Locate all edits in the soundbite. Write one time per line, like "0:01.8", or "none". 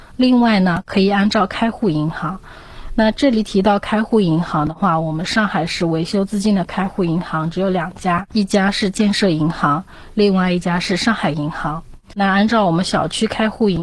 0:08.3
0:12.1